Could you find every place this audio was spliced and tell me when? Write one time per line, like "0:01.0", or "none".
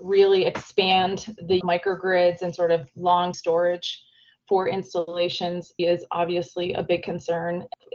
0:01.6
0:03.3
0:05.8